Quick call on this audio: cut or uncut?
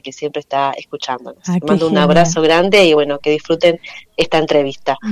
uncut